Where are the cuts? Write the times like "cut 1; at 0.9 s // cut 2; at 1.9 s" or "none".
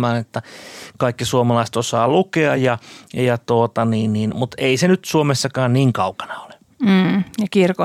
none